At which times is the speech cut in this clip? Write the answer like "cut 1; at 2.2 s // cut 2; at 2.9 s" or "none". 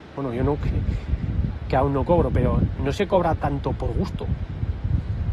none